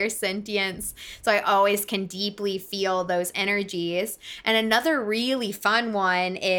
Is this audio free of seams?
yes; 0 cuts

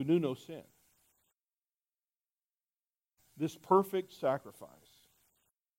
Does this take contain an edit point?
no; 0 cuts

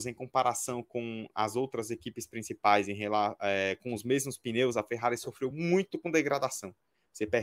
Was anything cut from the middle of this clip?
no; 0 cuts

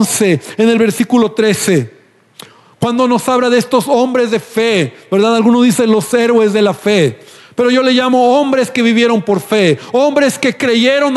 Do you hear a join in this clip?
no; 0 cuts

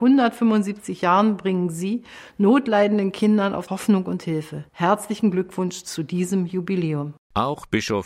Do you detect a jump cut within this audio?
yes; 2 cuts; at 3.7 s, 4.7 s

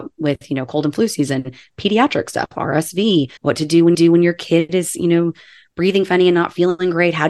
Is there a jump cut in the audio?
yes; 2 cuts; at 3.4 s, 3.9 s

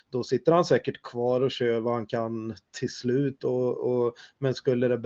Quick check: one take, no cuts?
yes; 0 cuts

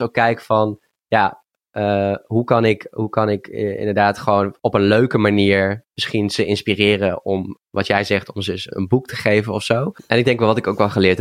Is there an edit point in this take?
yes; 1 cut; at 8.7 s

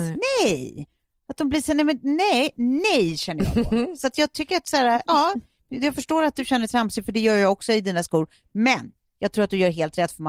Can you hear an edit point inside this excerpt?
no; 0 cuts

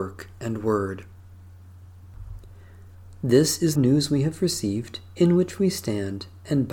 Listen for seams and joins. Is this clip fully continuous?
no; 1 cut; at 3.8 s

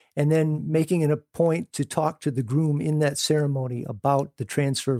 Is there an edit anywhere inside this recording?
no; 0 cuts

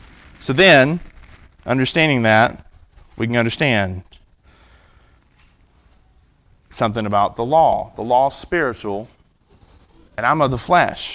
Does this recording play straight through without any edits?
yes; 0 cuts

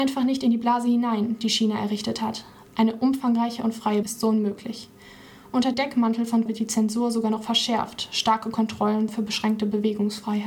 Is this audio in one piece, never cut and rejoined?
no; 4 cuts; at 4.0 s, 5.7 s, 6.5 s, 9.1 s

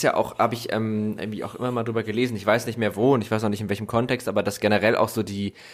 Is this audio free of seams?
yes; 0 cuts

